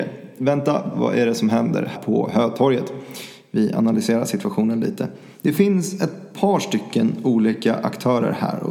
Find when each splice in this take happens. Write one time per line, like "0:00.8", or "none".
0:00.9
0:01.9